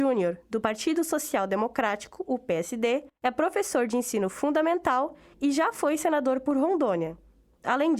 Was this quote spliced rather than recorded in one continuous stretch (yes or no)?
yes